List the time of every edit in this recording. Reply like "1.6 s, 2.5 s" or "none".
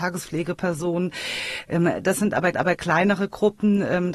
2.5 s